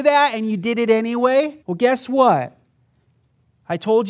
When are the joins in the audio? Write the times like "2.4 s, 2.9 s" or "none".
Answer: 1.6 s